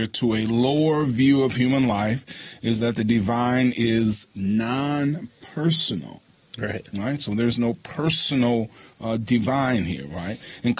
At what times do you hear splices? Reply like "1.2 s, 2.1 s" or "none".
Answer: none